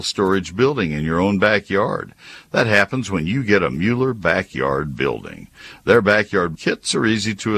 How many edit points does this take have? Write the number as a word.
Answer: one